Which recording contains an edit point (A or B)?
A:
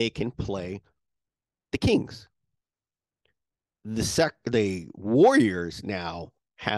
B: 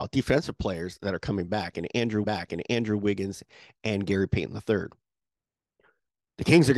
B